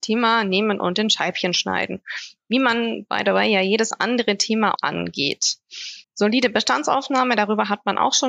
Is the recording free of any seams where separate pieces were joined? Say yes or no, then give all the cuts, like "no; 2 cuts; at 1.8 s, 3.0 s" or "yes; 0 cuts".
no; 2 cuts; at 4.8 s, 6.0 s